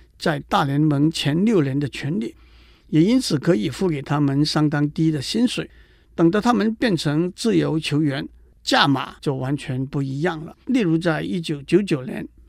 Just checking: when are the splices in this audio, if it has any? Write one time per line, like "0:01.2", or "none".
0:10.6